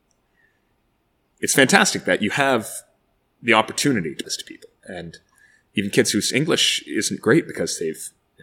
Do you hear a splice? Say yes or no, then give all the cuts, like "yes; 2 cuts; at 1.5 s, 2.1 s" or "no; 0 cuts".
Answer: yes; 1 cut; at 4.2 s